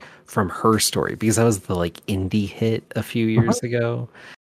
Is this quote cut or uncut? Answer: uncut